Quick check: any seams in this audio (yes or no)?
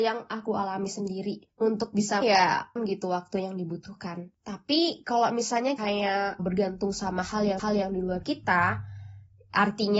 yes